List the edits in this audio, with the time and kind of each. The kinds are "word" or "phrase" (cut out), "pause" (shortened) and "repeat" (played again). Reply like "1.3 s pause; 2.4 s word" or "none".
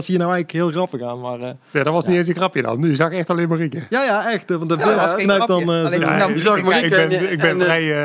none